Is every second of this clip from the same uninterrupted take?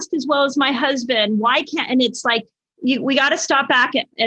yes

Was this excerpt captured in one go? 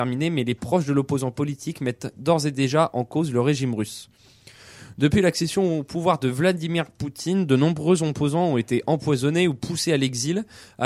yes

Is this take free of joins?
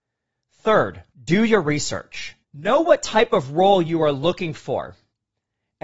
no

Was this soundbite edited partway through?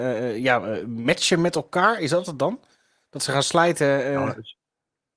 no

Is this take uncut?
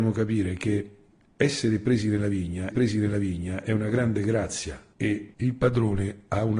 no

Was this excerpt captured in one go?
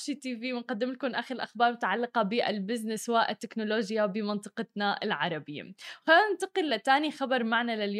yes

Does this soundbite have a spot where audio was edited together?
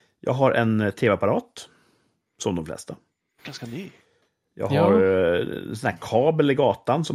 no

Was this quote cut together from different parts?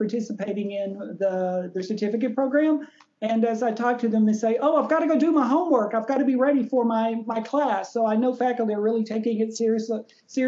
no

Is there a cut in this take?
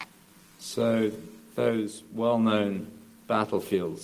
no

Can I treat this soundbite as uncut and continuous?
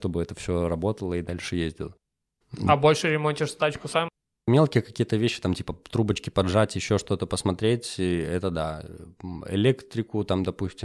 yes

